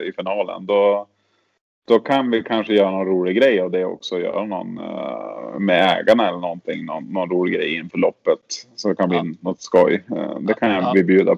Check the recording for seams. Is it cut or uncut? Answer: uncut